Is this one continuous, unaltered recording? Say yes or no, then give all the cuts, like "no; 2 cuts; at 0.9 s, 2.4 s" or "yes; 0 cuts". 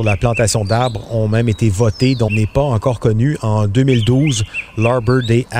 no; 1 cut; at 2.3 s